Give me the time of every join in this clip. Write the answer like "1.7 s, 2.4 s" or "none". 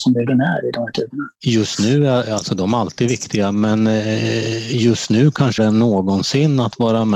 1.3 s, 5.6 s

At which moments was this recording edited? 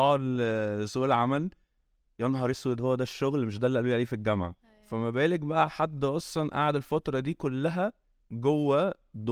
none

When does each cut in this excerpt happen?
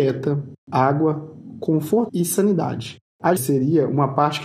2.1 s, 3.4 s

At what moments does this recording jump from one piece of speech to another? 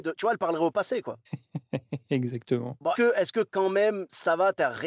2.9 s

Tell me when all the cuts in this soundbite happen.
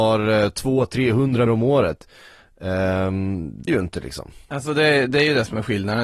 1.5 s, 3.7 s, 4.4 s

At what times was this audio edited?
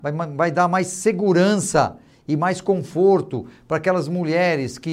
none

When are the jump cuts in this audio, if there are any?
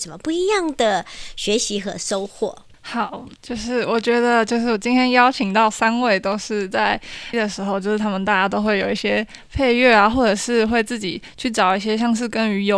7.3 s

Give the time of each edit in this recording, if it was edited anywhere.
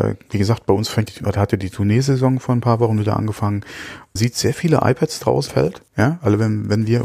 1.1 s, 4.2 s, 5.5 s, 5.9 s

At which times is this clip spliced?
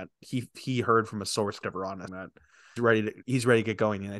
1.6 s, 2.1 s, 2.8 s

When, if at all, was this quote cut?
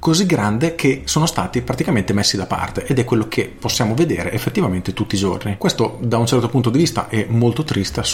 none

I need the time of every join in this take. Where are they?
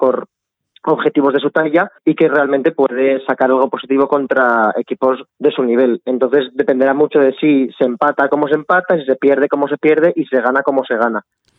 2.0 s, 5.3 s

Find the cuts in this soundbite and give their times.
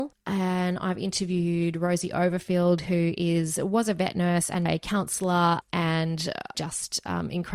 4.7 s, 6.5 s

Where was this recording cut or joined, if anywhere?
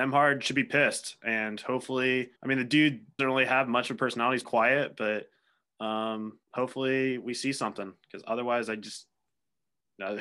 2.4 s, 3.2 s, 4.4 s, 6.4 s

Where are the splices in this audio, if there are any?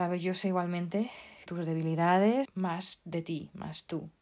1.5 s, 2.5 s

